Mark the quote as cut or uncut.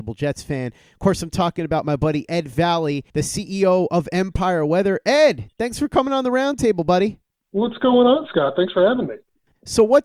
cut